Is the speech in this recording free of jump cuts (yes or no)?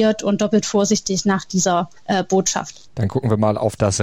no